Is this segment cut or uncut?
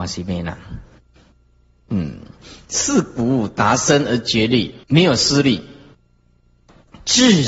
cut